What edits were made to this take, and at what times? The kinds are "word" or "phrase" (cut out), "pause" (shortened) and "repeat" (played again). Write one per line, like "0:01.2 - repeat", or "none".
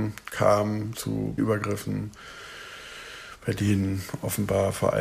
0:01.4 - word